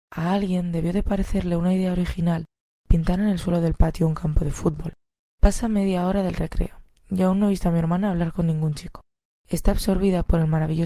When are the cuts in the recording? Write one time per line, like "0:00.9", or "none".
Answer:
none